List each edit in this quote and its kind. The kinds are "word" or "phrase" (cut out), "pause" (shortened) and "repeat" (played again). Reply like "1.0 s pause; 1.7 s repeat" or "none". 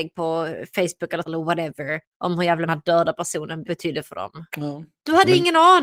1.3 s word; 2.7 s phrase; 3.6 s word; 4.5 s pause